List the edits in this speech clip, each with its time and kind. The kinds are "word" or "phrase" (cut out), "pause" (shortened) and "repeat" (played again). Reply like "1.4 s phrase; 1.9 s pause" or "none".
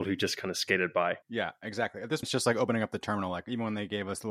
1.2 s pause; 2.2 s word